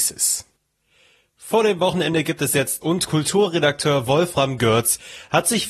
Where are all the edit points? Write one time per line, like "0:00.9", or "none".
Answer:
0:02.8